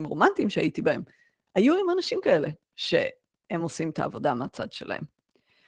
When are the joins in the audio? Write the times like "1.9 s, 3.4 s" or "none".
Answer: none

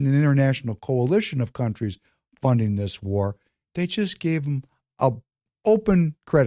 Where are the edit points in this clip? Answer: none

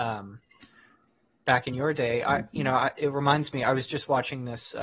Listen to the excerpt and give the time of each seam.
none

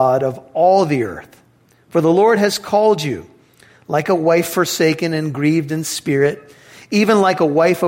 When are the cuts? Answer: none

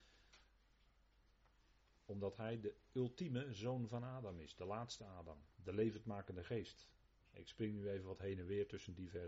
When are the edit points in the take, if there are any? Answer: 5.5 s, 7.1 s

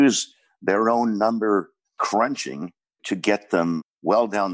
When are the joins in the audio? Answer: none

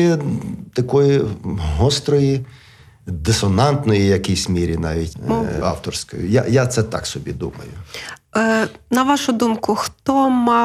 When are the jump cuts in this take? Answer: 5.6 s

